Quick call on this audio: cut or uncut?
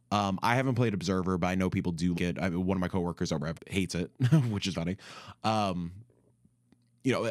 cut